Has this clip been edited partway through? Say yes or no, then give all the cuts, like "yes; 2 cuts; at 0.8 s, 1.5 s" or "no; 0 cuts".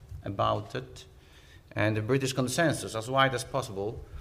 no; 0 cuts